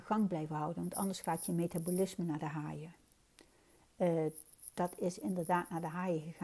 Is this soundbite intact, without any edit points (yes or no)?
yes